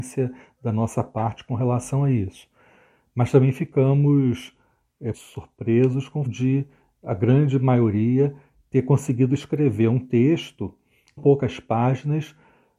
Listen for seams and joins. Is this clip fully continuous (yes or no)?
no